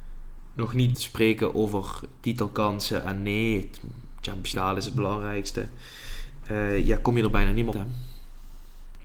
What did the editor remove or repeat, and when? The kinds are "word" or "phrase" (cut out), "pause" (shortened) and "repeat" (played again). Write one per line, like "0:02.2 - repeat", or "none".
0:00.9 - word
0:04.5 - word
0:07.7 - word